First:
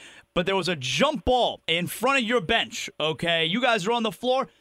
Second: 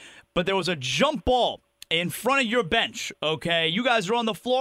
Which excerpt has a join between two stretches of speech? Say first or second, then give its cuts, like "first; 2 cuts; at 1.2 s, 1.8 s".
first; 1 cut; at 1.6 s